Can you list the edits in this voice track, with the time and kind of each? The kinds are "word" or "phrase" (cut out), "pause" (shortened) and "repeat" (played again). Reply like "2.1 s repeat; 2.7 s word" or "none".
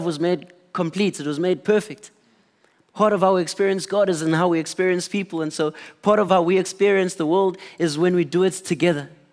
none